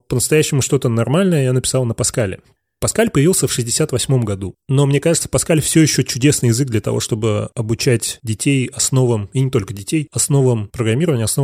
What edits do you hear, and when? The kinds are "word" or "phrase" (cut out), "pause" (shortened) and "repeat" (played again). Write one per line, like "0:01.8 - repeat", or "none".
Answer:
none

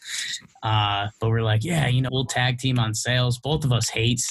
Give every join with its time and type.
0:02.1 - word

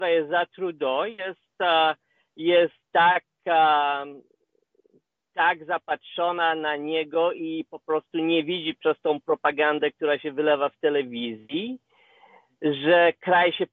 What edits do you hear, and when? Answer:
none

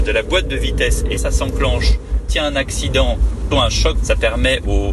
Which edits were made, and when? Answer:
0:01.2 - word
0:02.3 - word
0:03.5 - word
0:03.9 - word

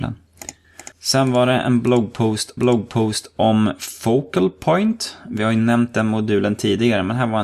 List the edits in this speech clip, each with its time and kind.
0:00.9 - pause
0:02.6 - repeat

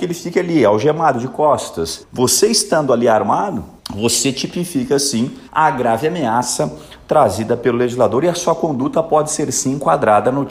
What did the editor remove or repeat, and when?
0:02.0 - phrase
0:03.8 - pause
0:05.5 - pause

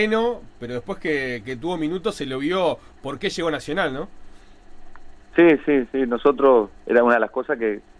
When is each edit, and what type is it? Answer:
0:06.8 - pause

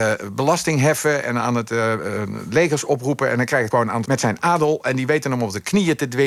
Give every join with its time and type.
0:03.7 - word
0:04.0 - phrase

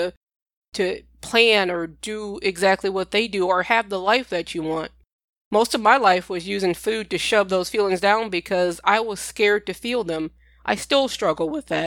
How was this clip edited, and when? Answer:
none

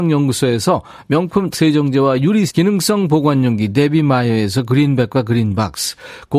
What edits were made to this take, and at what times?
0:01.5 - word
0:02.5 - word

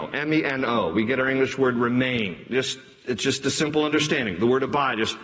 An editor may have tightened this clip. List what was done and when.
none

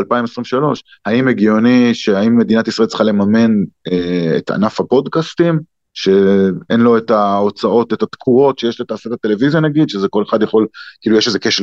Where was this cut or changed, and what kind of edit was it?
none

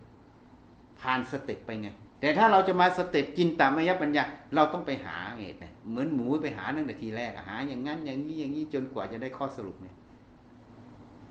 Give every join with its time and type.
0:02.1 - pause
0:05.8 - pause

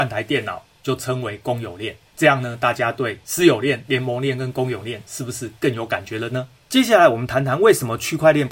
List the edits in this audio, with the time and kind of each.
none

